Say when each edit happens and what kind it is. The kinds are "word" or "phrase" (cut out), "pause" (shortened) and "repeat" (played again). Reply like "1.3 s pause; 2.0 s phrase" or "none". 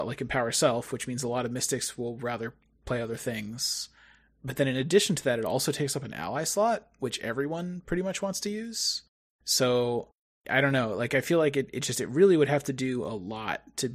none